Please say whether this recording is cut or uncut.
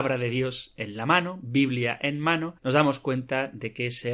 cut